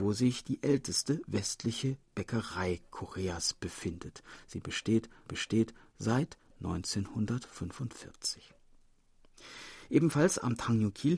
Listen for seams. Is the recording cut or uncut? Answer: cut